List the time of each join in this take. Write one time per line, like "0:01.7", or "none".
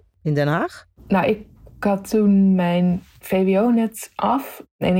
none

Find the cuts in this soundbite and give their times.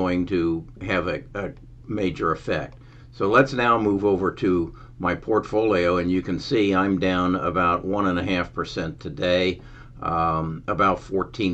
none

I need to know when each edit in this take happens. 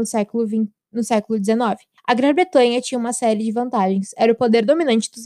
0:02.0

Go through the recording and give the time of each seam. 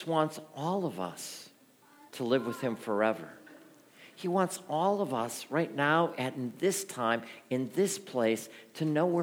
0:02.1

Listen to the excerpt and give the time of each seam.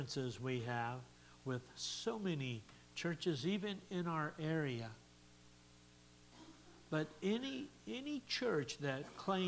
none

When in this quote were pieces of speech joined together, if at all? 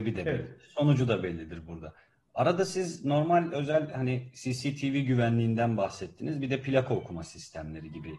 none

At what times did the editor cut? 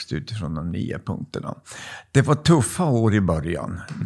none

